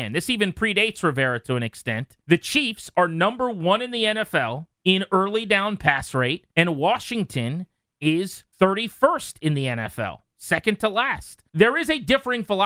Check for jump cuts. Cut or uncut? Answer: cut